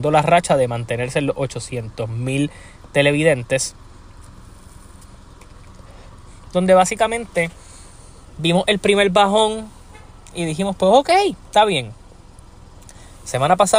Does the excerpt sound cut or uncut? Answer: uncut